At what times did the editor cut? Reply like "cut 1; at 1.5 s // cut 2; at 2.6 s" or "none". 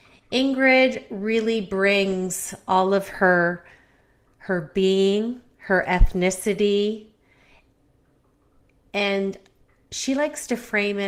none